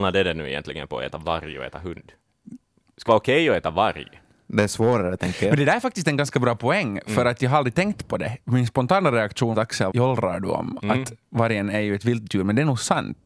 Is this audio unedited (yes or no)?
no